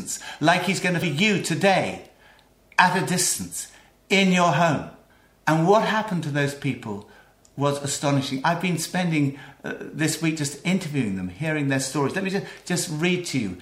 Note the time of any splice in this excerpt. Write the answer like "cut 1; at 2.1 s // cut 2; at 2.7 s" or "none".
cut 1; at 1.0 s // cut 2; at 5.1 s

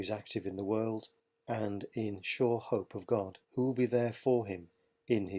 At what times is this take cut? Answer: cut 1; at 1.2 s // cut 2; at 3.4 s

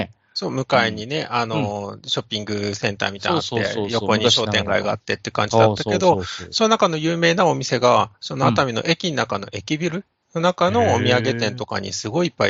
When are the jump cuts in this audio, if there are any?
none

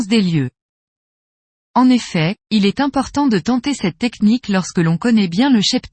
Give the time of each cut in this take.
cut 1; at 2.4 s

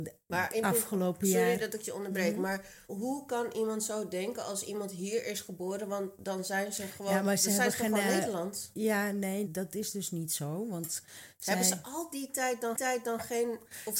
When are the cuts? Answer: cut 1; at 2.9 s // cut 2; at 9.5 s // cut 3; at 12.7 s

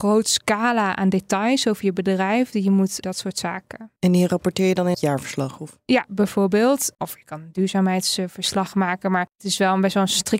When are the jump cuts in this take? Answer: cut 1; at 3.0 s // cut 2; at 4.0 s // cut 3; at 4.9 s

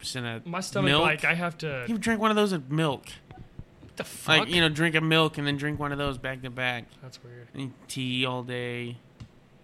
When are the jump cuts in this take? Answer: cut 1; at 7.5 s

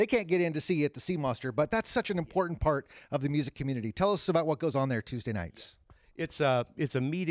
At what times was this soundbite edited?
none

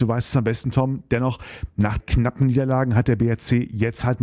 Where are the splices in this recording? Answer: cut 1; at 2.0 s

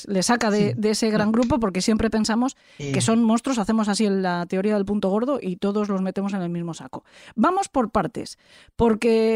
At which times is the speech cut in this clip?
none

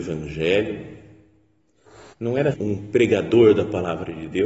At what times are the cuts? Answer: cut 1; at 2.1 s // cut 2; at 2.5 s

